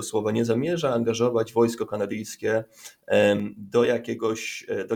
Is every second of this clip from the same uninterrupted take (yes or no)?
yes